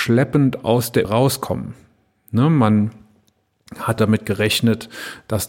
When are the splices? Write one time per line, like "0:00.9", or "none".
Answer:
0:01.0
0:04.0